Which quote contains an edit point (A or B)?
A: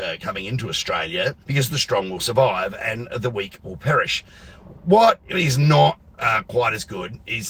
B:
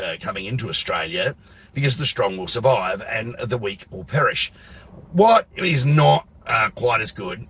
A